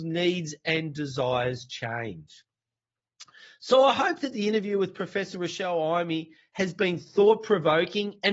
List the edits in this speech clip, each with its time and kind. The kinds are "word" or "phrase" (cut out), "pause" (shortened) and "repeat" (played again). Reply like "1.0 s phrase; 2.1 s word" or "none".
none